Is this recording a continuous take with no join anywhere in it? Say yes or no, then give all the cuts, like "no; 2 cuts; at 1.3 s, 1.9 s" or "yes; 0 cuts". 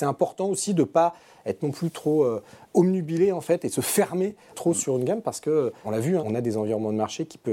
no; 4 cuts; at 2.7 s, 4.5 s, 5.8 s, 6.2 s